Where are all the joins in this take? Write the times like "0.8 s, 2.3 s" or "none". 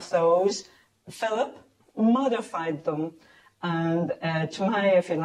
none